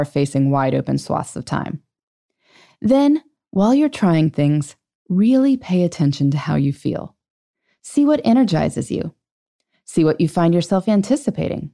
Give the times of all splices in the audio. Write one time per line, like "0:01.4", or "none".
none